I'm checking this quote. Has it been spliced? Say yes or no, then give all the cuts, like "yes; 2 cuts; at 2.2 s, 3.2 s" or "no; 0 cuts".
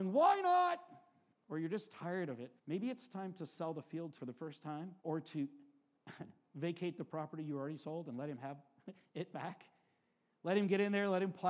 yes; 3 cuts; at 2.6 s, 4.2 s, 5.0 s